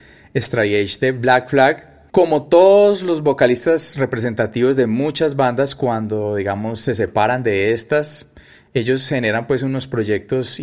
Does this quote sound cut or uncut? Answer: uncut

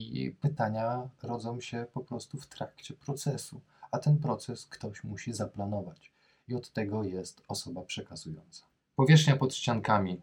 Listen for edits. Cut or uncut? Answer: uncut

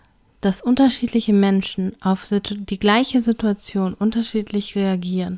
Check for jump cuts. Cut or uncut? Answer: uncut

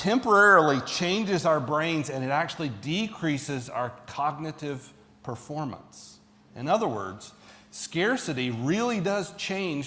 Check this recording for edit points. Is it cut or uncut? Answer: uncut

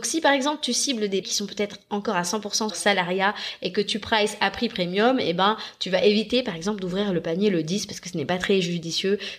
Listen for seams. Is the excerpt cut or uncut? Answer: cut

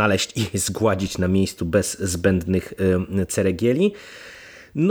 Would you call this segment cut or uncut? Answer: uncut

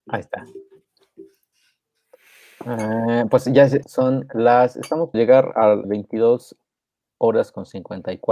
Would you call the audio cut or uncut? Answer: cut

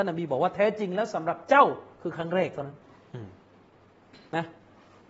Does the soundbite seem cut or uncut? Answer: cut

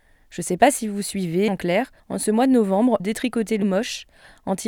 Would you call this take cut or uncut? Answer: cut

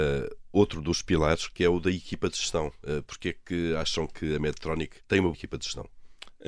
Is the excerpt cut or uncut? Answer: cut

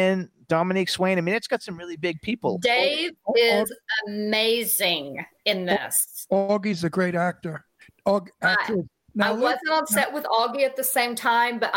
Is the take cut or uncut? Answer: uncut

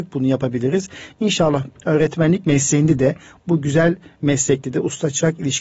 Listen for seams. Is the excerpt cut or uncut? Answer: uncut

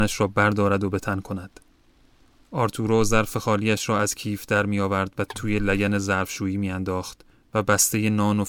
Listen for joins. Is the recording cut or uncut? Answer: uncut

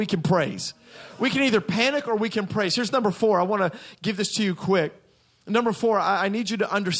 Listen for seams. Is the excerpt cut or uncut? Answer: uncut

